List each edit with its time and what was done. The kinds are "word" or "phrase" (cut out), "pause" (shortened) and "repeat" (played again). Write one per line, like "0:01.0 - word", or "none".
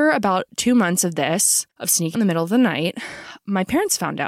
0:01.7 - pause
0:02.1 - word